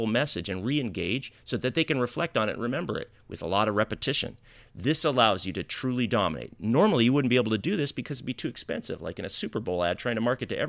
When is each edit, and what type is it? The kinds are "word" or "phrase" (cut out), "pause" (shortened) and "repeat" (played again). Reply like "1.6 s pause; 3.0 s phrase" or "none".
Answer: none